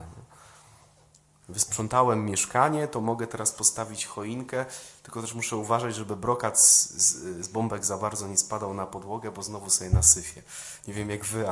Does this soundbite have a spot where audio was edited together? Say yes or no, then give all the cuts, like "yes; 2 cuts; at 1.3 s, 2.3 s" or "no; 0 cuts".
no; 0 cuts